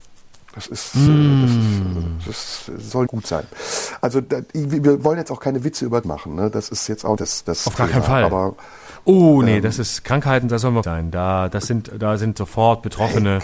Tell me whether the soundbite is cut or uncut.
cut